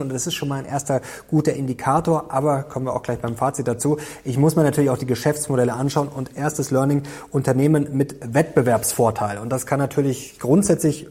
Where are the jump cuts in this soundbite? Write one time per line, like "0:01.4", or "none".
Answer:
none